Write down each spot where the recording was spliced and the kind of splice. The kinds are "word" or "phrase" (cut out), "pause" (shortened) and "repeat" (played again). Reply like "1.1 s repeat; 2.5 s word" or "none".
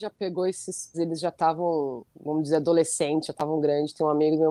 0.9 s word; 2.1 s pause